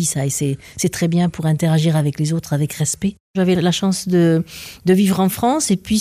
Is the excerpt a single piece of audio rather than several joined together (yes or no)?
yes